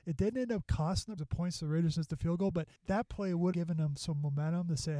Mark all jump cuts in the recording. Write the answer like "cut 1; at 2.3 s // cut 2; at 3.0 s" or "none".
cut 1; at 1.2 s // cut 2; at 2.8 s // cut 3; at 3.5 s